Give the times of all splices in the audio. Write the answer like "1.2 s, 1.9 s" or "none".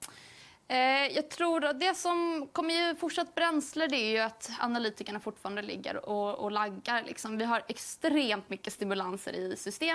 none